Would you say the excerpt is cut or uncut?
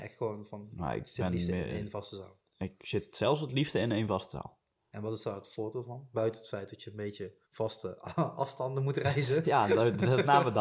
cut